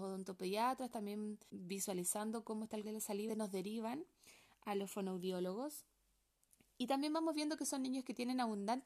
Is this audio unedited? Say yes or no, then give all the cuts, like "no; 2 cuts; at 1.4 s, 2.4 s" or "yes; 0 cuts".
no; 3 cuts; at 1.5 s, 2.8 s, 3.3 s